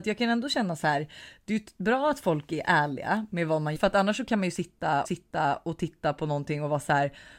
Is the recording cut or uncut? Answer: cut